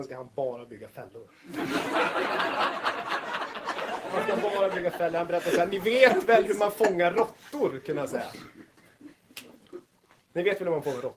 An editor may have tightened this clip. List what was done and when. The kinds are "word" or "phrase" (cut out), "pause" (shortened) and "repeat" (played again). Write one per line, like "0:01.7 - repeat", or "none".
none